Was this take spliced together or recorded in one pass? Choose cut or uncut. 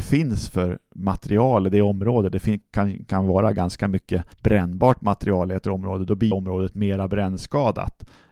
cut